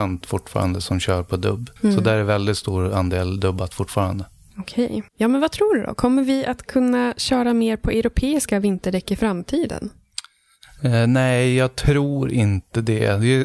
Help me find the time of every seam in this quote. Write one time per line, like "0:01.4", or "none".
0:01.8
0:05.1